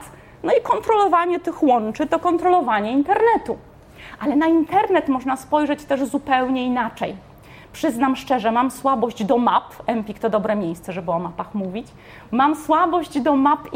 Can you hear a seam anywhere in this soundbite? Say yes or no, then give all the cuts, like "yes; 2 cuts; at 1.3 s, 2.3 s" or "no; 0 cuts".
no; 0 cuts